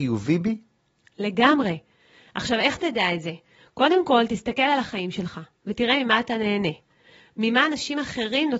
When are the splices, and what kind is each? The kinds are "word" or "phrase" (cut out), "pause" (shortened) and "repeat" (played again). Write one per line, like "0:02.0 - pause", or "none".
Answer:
none